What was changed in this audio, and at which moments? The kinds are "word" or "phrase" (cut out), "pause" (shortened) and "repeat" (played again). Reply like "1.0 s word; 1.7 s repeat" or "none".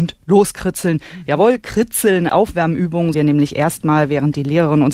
2.3 s word; 3.1 s word